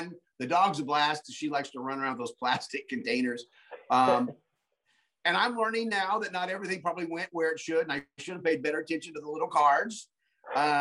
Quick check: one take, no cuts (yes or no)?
yes